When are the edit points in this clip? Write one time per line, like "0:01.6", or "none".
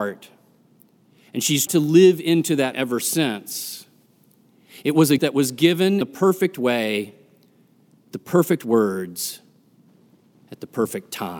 0:01.7
0:02.7
0:05.2
0:06.0
0:08.1